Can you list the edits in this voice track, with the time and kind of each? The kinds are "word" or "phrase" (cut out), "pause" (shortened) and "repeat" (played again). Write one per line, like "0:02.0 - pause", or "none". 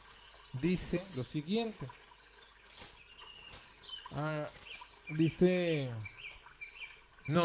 none